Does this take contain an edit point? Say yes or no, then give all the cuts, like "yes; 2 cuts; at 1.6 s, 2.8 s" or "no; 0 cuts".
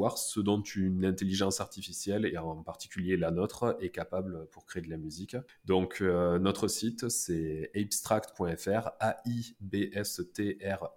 no; 0 cuts